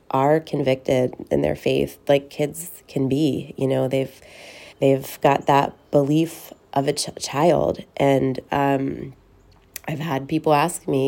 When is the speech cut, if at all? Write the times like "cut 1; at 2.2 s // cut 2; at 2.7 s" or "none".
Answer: cut 1; at 4.7 s